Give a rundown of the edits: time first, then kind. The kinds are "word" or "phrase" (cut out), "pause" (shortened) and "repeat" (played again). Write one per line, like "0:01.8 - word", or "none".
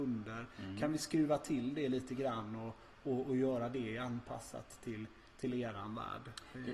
none